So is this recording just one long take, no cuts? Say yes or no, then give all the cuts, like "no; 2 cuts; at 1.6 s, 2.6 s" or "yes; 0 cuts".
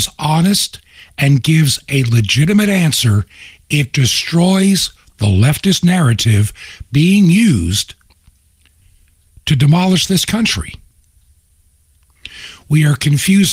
yes; 0 cuts